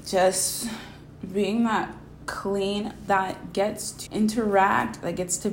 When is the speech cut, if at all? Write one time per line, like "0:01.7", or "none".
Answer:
0:03.1
0:04.1